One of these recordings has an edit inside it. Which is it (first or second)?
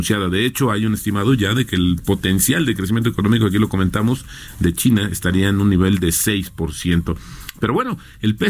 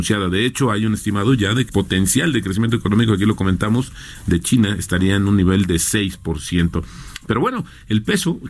second